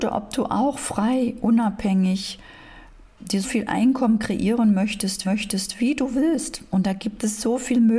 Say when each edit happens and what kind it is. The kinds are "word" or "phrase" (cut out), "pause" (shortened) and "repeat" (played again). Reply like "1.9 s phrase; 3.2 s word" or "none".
3.4 s word; 5.2 s repeat